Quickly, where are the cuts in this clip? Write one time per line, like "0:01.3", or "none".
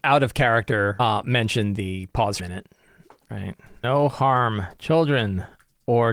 0:02.4
0:03.8
0:04.8